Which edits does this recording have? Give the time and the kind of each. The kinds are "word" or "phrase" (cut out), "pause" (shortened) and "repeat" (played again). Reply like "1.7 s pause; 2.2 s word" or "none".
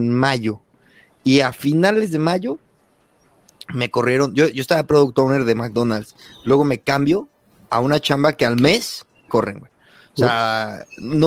9.3 s word